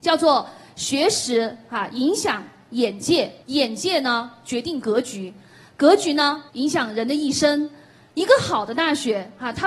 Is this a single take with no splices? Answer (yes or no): no